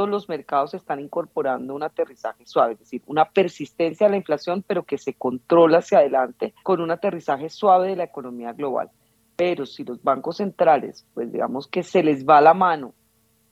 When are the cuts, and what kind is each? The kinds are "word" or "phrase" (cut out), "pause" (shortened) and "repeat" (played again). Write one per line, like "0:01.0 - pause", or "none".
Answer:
0:06.6 - pause